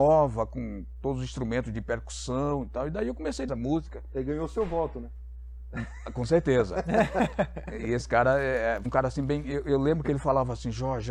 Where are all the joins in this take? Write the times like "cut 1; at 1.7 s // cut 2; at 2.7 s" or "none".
cut 1; at 3.5 s // cut 2; at 8.8 s